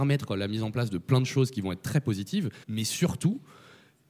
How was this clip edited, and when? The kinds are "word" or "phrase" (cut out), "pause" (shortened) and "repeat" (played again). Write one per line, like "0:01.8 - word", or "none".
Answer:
0:02.6 - pause

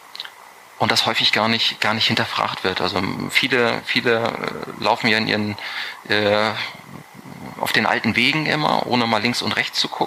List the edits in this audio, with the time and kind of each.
none

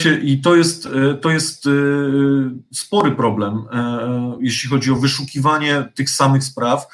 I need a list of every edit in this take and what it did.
none

